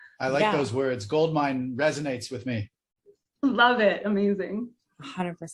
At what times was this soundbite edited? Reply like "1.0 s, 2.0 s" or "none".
none